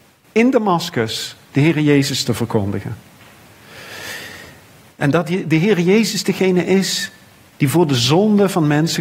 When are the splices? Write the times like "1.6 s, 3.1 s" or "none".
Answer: none